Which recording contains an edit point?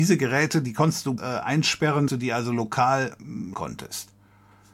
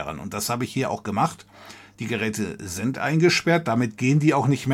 first; 3 cuts; at 1.2 s, 2.1 s, 3.5 s

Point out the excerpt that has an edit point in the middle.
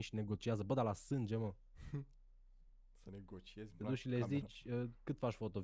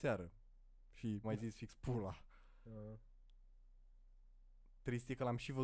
second; 1 cut; at 1.2 s

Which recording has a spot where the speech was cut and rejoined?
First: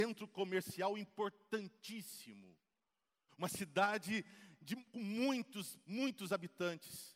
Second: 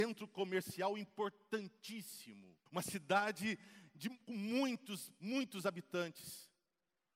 second; 1 cut; at 2.7 s

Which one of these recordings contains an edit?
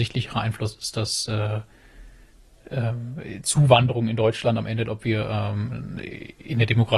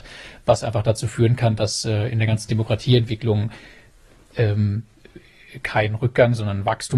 first; 1 cut; at 4.9 s

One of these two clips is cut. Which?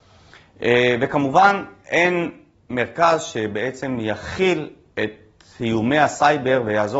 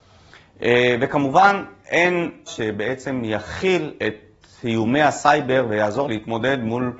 second; 3 cuts; at 2.5 s, 4.0 s, 6.0 s

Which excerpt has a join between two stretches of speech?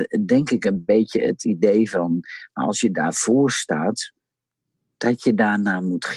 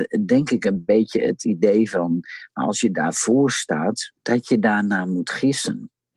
second; 1 cut; at 4.2 s

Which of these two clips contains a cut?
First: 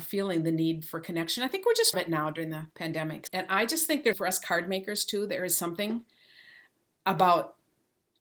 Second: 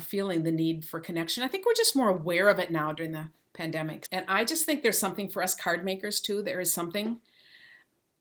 first; 3 cuts; at 1.9 s, 2.7 s, 4.1 s

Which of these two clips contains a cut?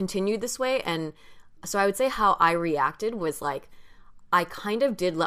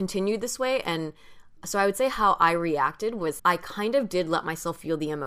second; 1 cut; at 3.4 s

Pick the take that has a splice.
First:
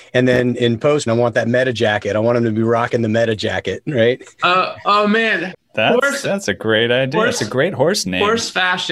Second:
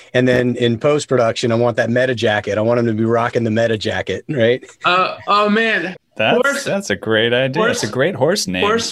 first; 1 cut; at 1.1 s

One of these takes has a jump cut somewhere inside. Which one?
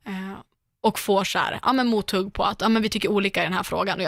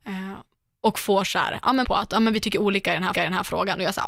second; 2 cuts; at 1.8 s, 3.1 s

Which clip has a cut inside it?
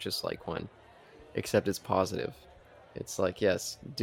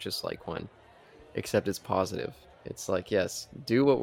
second; 1 cut; at 2.5 s

